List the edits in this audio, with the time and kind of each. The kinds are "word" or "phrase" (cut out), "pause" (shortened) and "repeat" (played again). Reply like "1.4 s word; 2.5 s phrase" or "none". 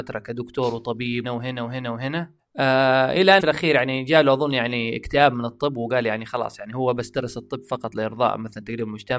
1.2 s word; 2.4 s pause; 3.4 s phrase